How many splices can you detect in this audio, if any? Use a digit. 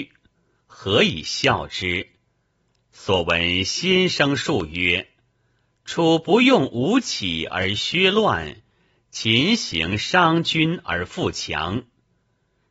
0